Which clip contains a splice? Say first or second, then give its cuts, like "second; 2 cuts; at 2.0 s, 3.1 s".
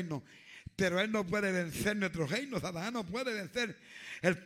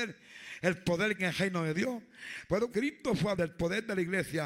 second; 3 cuts; at 1.2 s, 2.7 s, 3.3 s